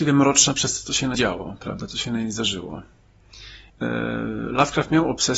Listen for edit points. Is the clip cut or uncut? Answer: cut